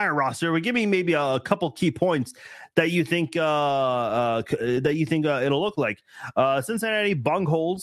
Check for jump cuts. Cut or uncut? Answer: uncut